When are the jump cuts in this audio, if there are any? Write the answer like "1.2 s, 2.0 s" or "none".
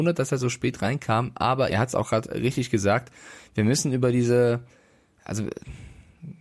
1.7 s